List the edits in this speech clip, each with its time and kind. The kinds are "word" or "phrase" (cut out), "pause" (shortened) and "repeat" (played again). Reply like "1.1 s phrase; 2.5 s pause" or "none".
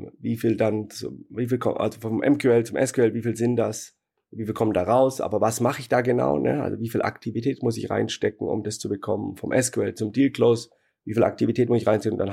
none